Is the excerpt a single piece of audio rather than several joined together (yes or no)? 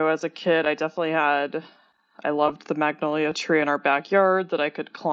yes